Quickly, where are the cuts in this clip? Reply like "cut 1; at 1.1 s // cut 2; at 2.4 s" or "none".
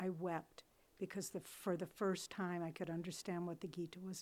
none

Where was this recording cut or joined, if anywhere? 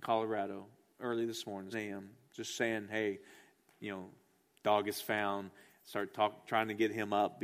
cut 1; at 1.7 s

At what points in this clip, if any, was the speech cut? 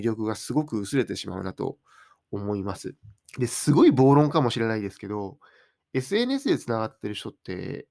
cut 1; at 3.2 s

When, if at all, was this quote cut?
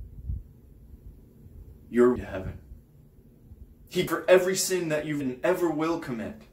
cut 1; at 2.2 s // cut 2; at 4.1 s // cut 3; at 5.2 s

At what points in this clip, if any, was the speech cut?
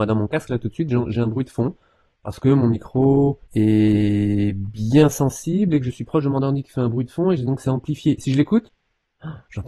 cut 1; at 3.5 s

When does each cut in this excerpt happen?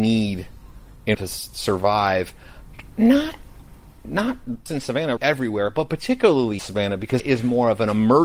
cut 1; at 1.1 s // cut 2; at 4.7 s // cut 3; at 5.2 s // cut 4; at 6.6 s // cut 5; at 7.2 s

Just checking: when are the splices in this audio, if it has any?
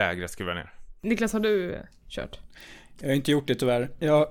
none

